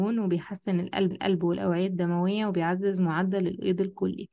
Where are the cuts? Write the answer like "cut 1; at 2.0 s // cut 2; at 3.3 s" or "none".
cut 1; at 1.1 s